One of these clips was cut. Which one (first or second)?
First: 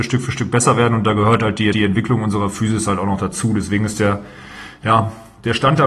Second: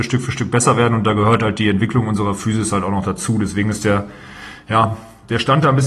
first